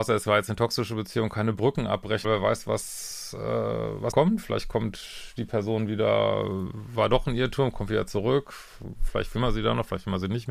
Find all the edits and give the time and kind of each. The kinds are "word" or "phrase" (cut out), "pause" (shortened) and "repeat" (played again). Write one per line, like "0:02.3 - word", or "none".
0:02.2 - word
0:04.1 - word